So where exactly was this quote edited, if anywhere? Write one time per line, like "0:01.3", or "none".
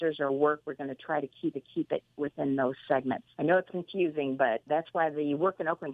0:01.5
0:03.3
0:03.7
0:04.7